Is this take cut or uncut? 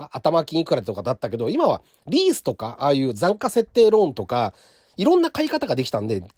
uncut